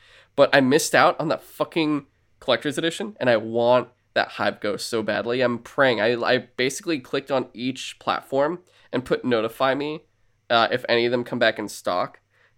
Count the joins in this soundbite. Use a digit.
0